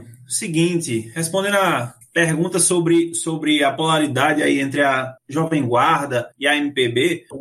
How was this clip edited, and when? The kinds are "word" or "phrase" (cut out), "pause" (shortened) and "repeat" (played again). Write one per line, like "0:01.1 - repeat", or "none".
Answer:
0:05.2 - pause
0:06.3 - pause